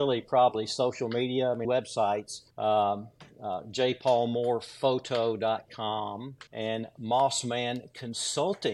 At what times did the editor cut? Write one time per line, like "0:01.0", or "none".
0:01.6
0:02.5
0:06.5